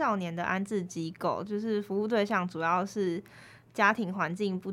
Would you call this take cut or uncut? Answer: uncut